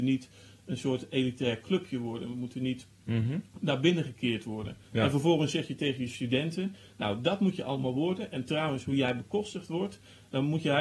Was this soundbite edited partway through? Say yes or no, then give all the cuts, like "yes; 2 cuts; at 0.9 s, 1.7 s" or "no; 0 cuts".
yes; 1 cut; at 4.8 s